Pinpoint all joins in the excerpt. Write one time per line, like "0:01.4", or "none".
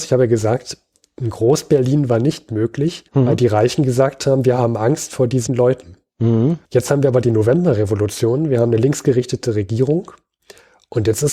0:03.1
0:05.5
0:06.6

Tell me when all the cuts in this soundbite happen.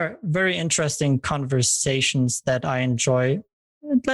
none

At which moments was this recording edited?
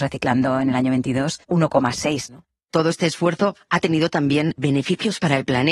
0:01.4

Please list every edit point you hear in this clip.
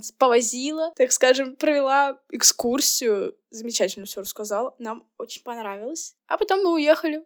0:06.2

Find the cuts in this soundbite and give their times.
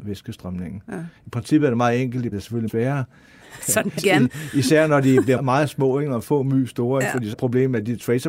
0:02.3
0:02.7
0:03.6
0:04.0
0:05.4
0:07.3

